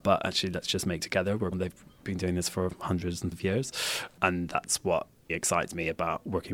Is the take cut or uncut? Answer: cut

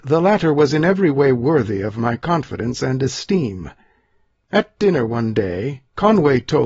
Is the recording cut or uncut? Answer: uncut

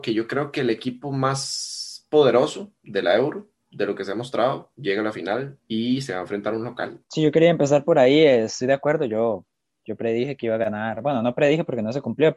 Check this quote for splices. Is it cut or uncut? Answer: uncut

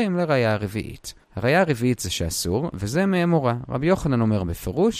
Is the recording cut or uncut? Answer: cut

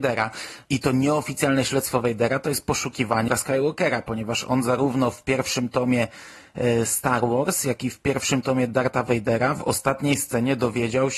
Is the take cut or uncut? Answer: cut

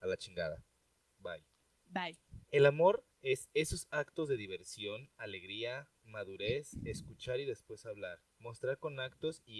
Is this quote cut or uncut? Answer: cut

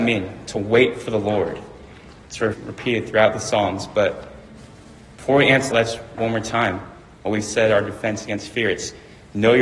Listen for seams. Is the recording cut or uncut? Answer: cut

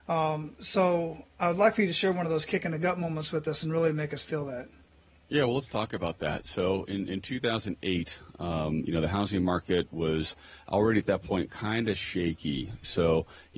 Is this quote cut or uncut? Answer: uncut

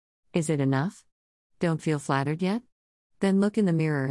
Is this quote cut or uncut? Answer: uncut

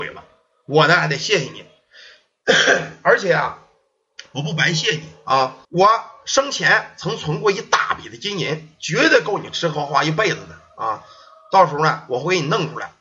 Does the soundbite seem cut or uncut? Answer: cut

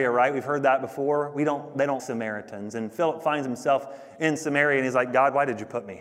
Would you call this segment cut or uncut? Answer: cut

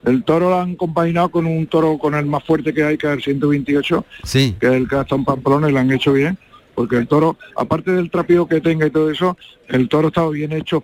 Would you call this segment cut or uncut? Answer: uncut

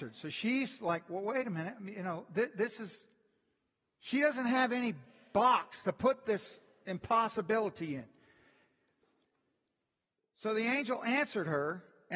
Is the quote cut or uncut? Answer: uncut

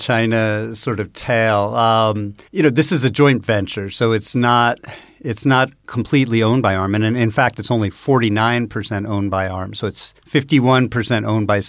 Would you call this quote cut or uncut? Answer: cut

